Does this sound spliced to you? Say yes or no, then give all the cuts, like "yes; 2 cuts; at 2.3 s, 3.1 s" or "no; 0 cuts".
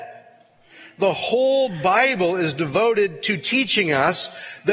no; 0 cuts